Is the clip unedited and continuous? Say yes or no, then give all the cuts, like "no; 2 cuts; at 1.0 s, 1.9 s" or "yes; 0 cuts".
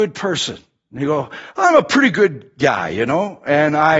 yes; 0 cuts